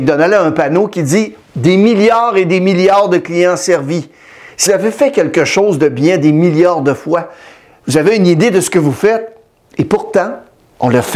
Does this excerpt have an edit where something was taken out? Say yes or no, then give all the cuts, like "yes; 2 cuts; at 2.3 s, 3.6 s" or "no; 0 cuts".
yes; 1 cut; at 4.7 s